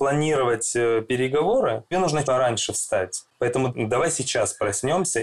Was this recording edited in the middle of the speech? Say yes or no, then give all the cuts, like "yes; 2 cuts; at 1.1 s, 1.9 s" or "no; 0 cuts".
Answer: yes; 3 cuts; at 1.9 s, 2.2 s, 3.7 s